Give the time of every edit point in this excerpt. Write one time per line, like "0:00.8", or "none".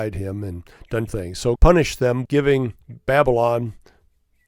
0:01.1
0:01.6
0:02.3